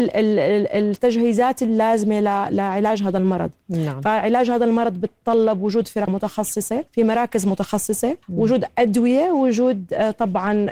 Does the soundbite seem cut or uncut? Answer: cut